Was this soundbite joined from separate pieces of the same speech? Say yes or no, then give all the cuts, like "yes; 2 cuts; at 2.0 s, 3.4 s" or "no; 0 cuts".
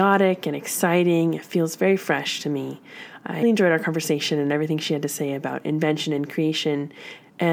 yes; 1 cut; at 3.4 s